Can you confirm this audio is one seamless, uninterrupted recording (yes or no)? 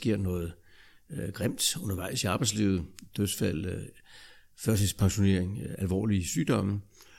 yes